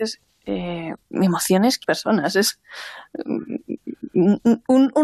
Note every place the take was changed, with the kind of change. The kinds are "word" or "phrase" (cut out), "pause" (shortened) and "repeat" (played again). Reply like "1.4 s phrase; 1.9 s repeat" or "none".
1.0 s pause; 1.8 s word